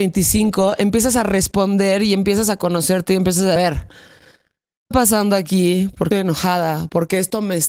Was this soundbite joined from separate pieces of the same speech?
yes; 3 cuts; at 3.6 s, 4.9 s, 6.1 s

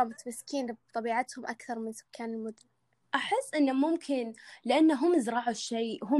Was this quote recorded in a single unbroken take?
no; 1 cut; at 3.0 s

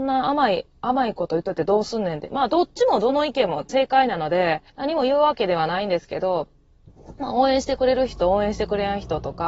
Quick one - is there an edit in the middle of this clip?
yes; 2 cuts; at 3.7 s, 4.7 s

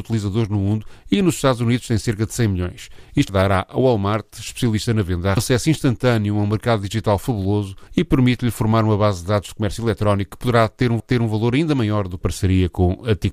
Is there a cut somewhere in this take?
yes; 5 cuts; at 3.3 s, 5.4 s, 7.9 s, 11.0 s, 12.2 s

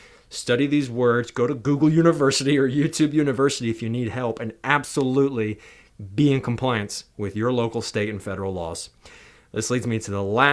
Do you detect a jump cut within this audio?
no; 0 cuts

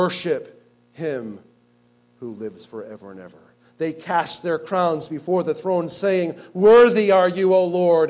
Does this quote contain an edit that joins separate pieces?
no; 0 cuts

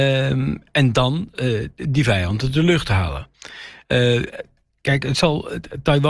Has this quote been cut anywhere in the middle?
no; 0 cuts

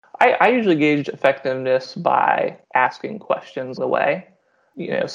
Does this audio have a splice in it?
yes; 2 cuts; at 2.6 s, 3.8 s

